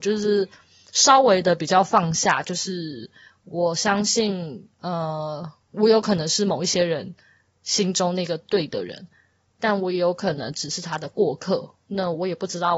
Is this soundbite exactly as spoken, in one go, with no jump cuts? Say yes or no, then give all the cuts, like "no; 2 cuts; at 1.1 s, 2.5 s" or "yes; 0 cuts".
yes; 0 cuts